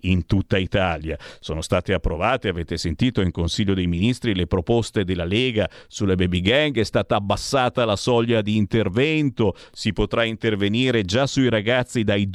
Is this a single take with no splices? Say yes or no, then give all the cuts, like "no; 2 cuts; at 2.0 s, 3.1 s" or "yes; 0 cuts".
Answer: yes; 0 cuts